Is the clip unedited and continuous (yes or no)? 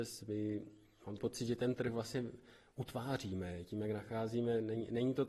no